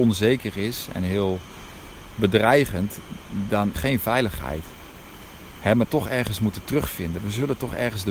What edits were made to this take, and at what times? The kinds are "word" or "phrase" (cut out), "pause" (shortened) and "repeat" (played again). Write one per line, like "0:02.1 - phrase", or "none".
0:03.7 - word
0:05.8 - phrase